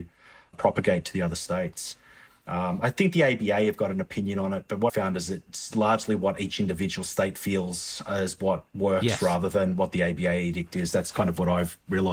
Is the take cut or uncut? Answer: cut